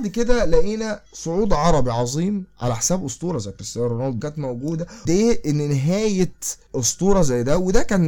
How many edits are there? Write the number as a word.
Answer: three